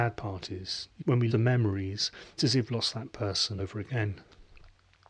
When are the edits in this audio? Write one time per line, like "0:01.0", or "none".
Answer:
0:01.0
0:01.3
0:02.4
0:02.7
0:03.6